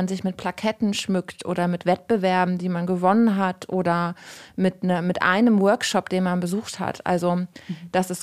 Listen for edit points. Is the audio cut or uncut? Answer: uncut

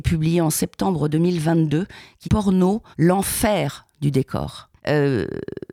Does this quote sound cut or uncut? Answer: cut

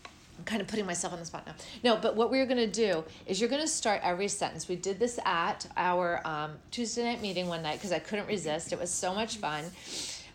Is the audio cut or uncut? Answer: uncut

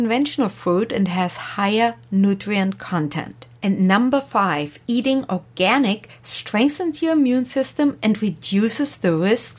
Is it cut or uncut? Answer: cut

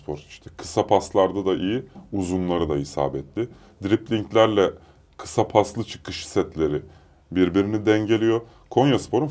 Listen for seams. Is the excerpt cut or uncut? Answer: uncut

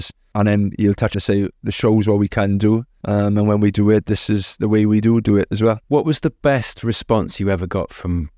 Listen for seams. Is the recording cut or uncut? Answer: cut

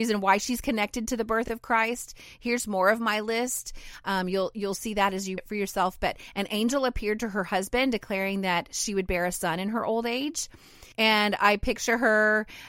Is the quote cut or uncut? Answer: cut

